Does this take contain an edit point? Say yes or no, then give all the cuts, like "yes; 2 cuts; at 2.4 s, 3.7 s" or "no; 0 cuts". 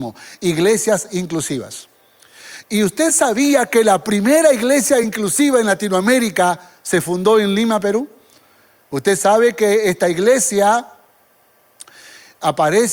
no; 0 cuts